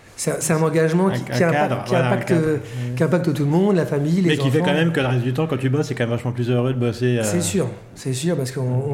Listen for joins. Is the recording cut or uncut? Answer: uncut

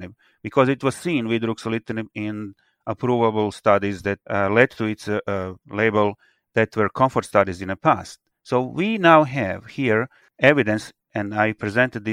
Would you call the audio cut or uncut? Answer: uncut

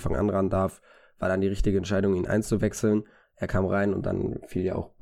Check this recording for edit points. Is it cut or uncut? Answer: uncut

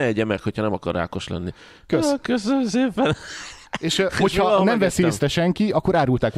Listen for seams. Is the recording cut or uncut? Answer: uncut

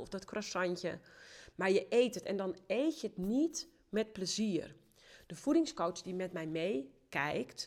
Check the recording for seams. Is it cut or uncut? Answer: uncut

